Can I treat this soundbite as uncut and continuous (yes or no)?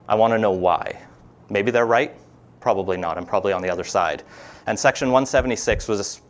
yes